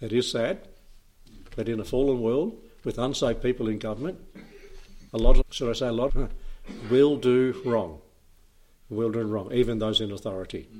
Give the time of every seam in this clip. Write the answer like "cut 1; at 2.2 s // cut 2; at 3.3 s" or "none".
cut 1; at 5.1 s // cut 2; at 5.4 s // cut 3; at 6.1 s